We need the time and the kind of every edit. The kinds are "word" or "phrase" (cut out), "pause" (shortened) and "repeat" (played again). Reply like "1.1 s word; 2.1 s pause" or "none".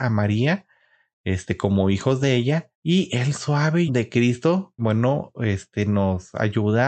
2.7 s pause; 3.9 s word; 4.8 s word